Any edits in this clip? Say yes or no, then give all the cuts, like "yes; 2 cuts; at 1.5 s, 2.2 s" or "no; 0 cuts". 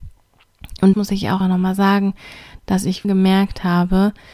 yes; 3 cuts; at 0.9 s, 1.4 s, 3.0 s